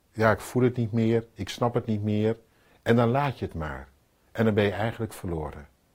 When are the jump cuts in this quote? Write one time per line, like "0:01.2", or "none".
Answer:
none